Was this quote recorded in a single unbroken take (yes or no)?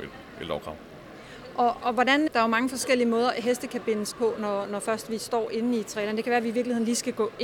no